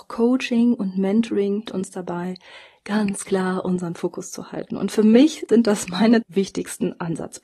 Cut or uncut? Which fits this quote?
cut